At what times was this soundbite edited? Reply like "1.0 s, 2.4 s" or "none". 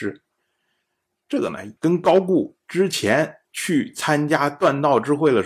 1.8 s, 3.4 s